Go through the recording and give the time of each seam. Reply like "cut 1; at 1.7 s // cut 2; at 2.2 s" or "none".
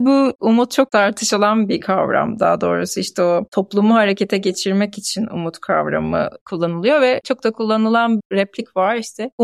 cut 1; at 6.4 s // cut 2; at 8.2 s